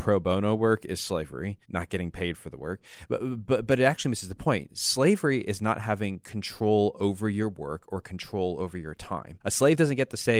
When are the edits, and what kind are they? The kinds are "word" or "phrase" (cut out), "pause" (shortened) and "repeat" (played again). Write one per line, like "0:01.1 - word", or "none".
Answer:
0:01.6 - pause
0:09.4 - pause